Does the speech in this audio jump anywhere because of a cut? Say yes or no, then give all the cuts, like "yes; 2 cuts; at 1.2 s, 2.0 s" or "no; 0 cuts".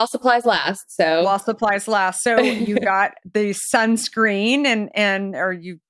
no; 0 cuts